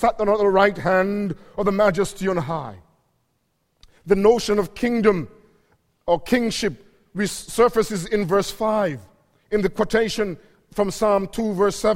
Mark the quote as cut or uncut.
uncut